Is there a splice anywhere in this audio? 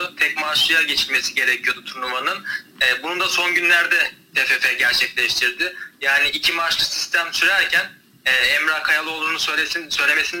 no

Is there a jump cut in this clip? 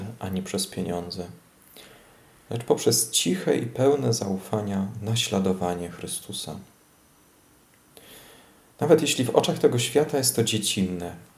no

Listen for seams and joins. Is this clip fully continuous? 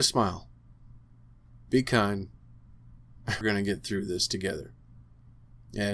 no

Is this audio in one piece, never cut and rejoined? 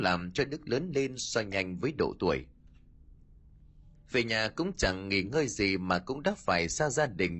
yes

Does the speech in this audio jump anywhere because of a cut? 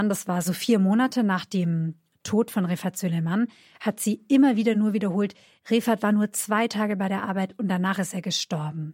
no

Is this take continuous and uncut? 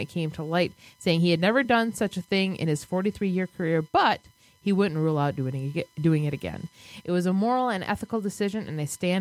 yes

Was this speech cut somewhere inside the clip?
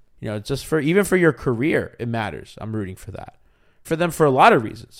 yes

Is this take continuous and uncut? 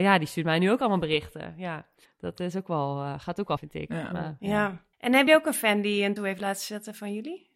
no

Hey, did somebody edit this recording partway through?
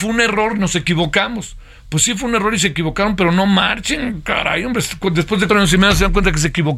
yes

